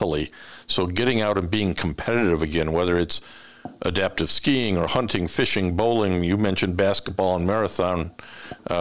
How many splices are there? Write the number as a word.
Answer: zero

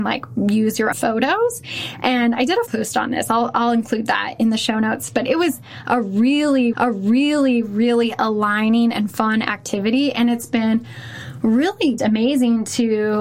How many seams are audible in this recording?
four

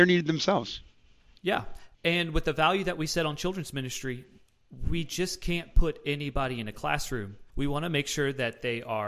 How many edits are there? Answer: two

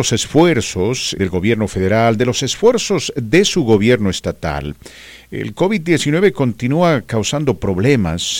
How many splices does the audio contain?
one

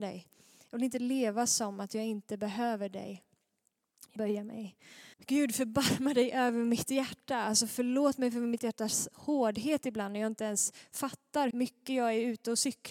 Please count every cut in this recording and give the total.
four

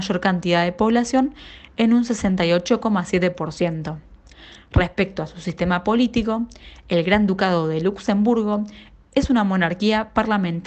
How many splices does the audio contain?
zero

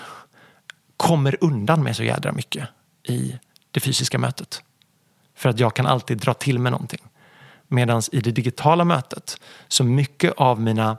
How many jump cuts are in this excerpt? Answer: zero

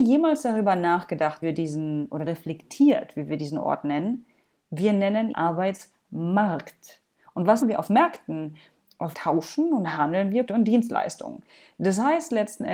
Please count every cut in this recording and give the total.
six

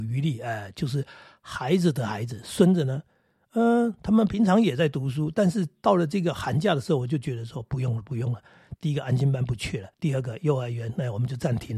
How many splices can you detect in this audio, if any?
one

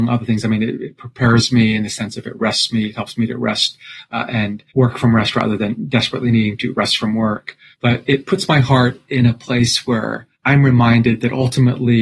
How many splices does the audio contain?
three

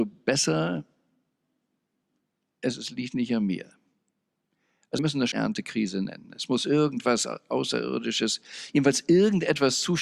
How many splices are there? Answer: two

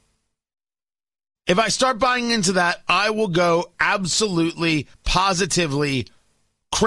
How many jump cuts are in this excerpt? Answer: one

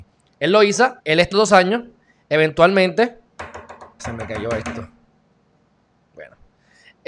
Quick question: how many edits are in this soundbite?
three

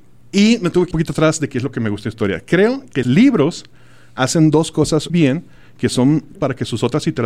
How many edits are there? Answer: four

